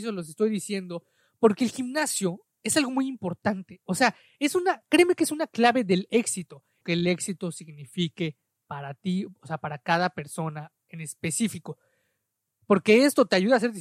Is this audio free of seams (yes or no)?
no